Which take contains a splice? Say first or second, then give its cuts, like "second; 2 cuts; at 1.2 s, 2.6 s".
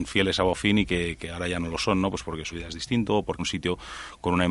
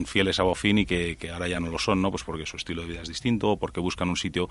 first; 2 cuts; at 2.5 s, 3.4 s